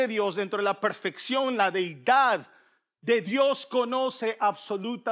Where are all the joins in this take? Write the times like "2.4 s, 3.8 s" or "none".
3.2 s